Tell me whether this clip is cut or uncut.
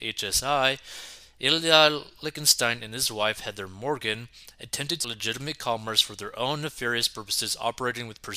cut